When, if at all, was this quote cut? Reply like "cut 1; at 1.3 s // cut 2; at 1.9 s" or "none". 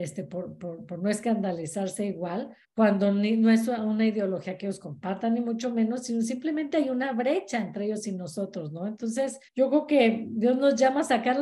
cut 1; at 2.6 s // cut 2; at 9.5 s